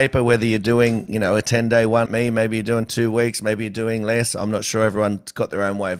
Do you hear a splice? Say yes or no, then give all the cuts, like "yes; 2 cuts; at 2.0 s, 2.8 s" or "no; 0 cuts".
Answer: yes; 1 cut; at 2.1 s